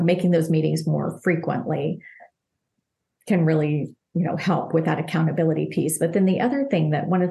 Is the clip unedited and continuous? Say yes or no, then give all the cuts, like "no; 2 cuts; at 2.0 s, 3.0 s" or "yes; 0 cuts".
yes; 0 cuts